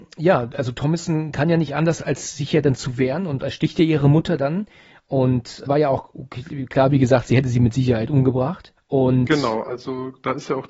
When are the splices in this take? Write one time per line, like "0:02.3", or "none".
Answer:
0:05.7
0:08.8